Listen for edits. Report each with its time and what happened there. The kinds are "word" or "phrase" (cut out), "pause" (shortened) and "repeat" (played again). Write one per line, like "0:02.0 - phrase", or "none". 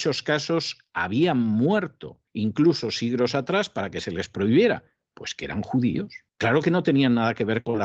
0:02.3 - pause
0:06.3 - pause